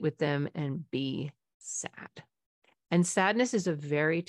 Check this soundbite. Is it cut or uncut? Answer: uncut